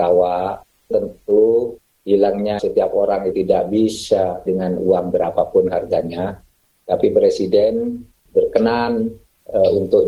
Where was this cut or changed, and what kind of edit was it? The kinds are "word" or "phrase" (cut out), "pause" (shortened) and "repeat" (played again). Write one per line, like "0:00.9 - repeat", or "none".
0:00.9 - word
0:02.6 - word
0:03.3 - word
0:04.5 - word